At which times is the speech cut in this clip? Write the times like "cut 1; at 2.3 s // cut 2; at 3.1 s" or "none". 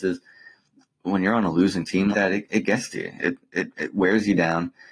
cut 1; at 2.1 s